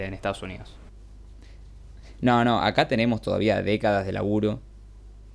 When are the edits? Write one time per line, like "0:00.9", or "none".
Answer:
none